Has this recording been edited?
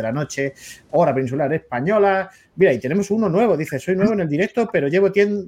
no; 0 cuts

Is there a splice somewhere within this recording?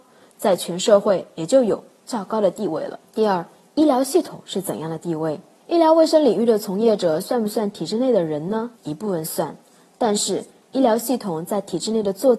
yes; 3 cuts; at 3.1 s, 5.6 s, 8.7 s

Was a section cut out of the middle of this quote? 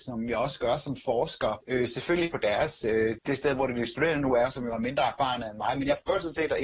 yes; 1 cut; at 3.2 s

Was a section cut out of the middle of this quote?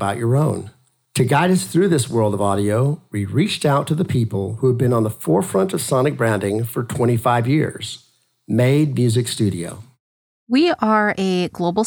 no; 0 cuts

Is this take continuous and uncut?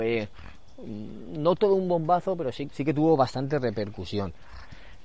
no; 1 cut; at 2.7 s

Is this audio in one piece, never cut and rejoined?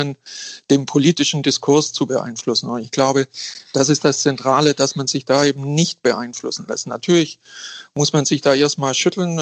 yes; 0 cuts

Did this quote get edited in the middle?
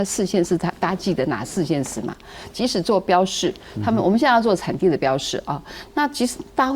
no; 0 cuts

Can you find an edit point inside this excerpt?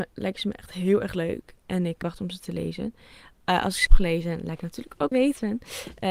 yes; 3 cuts; at 2.0 s, 3.9 s, 5.1 s

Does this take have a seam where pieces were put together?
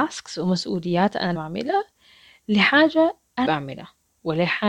yes; 2 cuts; at 1.3 s, 3.4 s

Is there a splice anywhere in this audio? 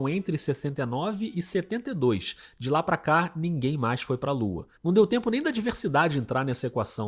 yes; 1 cut; at 4.7 s

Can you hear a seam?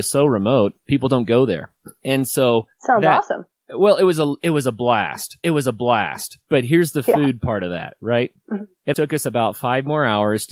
yes; 2 cuts; at 5.4 s, 8.9 s

